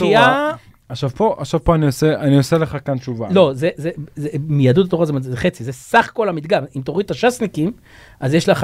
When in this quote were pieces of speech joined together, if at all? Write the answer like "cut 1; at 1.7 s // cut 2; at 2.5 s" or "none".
none